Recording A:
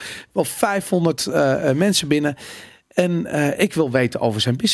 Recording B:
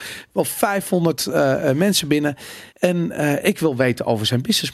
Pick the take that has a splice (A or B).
B